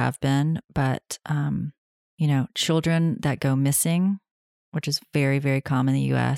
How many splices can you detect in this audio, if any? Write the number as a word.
one